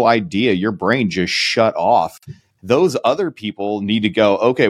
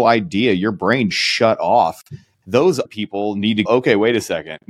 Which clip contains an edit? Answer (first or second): second